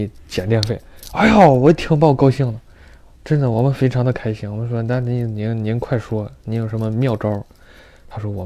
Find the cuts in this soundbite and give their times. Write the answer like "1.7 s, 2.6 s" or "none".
none